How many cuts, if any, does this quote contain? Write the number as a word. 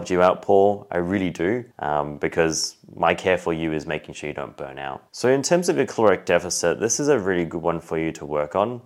two